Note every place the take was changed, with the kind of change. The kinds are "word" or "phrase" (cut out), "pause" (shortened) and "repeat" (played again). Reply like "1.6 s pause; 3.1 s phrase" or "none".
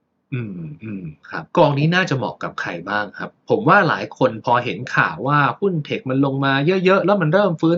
1.5 s pause